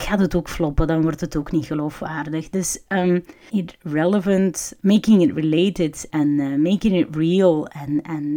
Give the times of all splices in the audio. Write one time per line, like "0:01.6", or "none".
0:03.5
0:04.8
0:06.1